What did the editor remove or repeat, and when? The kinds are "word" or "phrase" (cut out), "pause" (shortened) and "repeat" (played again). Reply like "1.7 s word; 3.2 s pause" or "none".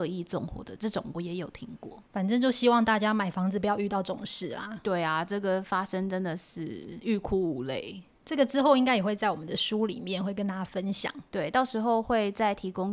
2.1 s pause; 11.3 s pause